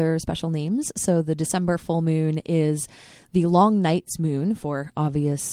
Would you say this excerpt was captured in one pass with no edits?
yes; 0 cuts

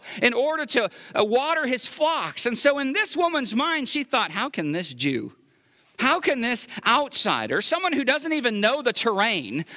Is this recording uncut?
yes; 0 cuts

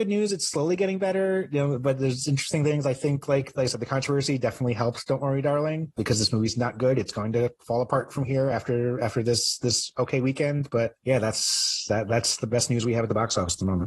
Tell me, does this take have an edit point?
no; 0 cuts

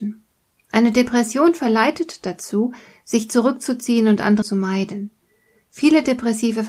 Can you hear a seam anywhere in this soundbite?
yes; 1 cut; at 4.4 s

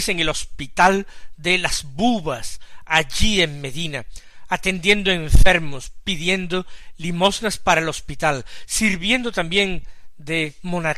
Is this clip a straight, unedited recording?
yes; 0 cuts

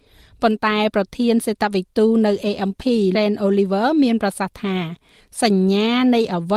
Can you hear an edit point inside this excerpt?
yes; 1 cut; at 3.1 s

